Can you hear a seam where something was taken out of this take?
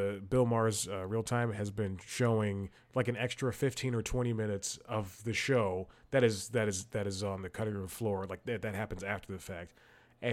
no; 0 cuts

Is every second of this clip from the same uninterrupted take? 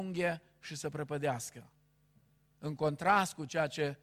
yes; 0 cuts

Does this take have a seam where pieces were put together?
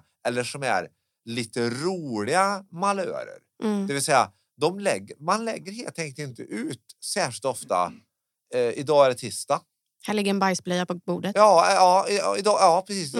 no; 0 cuts

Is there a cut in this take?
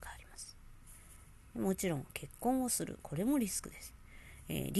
no; 0 cuts

